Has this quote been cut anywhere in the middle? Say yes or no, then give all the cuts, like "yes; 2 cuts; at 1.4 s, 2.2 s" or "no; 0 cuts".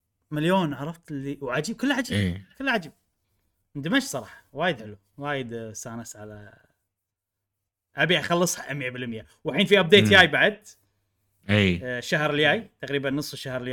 no; 0 cuts